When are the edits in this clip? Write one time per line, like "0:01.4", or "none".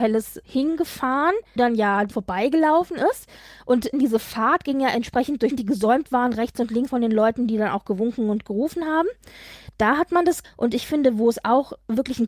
0:01.6
0:02.1
0:03.9
0:05.5
0:06.9
0:10.4